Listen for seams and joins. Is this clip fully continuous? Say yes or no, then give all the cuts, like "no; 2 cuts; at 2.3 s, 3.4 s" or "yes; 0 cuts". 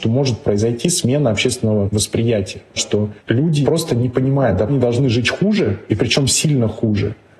no; 2 cuts; at 3.6 s, 4.7 s